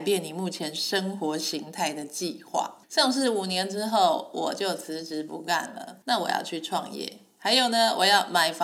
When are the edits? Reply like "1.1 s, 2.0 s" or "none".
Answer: 2.8 s, 6.0 s